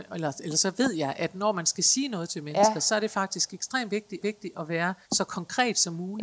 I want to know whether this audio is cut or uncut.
cut